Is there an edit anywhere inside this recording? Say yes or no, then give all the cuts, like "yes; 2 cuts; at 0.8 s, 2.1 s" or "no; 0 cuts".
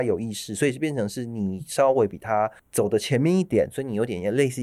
yes; 1 cut; at 2.6 s